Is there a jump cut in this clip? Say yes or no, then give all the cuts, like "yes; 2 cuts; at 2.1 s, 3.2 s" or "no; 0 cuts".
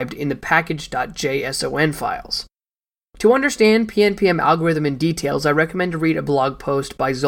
no; 0 cuts